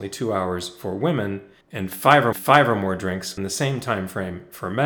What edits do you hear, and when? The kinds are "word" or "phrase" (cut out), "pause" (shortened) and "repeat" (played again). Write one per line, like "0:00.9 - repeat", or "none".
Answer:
0:01.6 - pause
0:02.3 - repeat
0:03.4 - word